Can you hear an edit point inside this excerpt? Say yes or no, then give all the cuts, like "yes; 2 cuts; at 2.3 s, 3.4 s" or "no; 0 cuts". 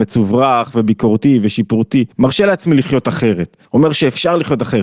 yes; 2 cuts; at 2.1 s, 3.7 s